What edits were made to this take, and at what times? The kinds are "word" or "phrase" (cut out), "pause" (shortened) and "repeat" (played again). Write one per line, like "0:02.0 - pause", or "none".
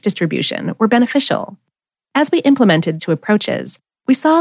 0:03.0 - word